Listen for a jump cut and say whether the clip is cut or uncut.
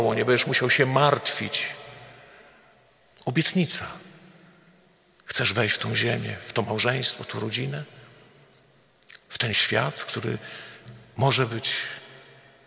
uncut